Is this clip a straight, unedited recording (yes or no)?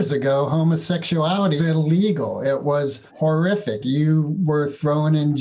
no